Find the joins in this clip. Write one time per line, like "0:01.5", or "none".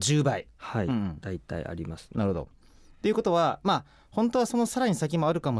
none